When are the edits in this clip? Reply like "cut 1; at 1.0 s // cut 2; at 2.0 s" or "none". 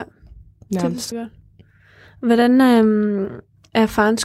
cut 1; at 1.1 s